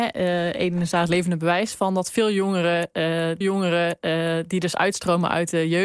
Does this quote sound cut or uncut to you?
cut